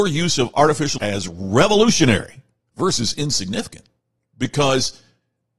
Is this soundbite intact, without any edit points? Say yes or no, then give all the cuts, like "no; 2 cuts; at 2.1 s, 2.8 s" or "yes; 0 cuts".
no; 3 cuts; at 1.0 s, 2.6 s, 4.2 s